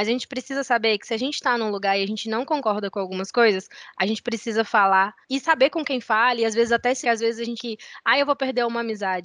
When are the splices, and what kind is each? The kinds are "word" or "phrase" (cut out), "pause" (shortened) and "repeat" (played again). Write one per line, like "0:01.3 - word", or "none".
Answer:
0:05.2 - pause
0:07.0 - phrase
0:07.6 - word